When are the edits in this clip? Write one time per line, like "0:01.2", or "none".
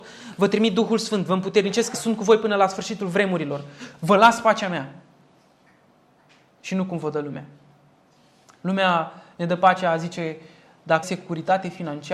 0:01.9
0:11.0